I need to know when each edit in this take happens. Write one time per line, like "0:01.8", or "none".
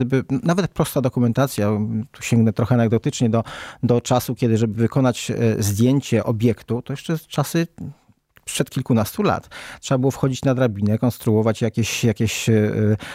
none